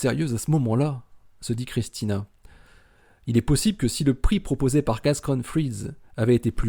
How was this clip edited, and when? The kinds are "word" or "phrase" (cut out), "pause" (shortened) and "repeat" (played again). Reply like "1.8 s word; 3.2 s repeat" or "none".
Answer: none